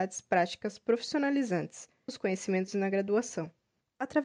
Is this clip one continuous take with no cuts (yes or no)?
no